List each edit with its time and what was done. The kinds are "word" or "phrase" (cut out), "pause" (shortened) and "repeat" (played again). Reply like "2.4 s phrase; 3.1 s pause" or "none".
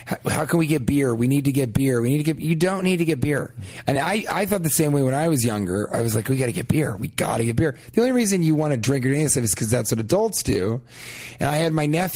none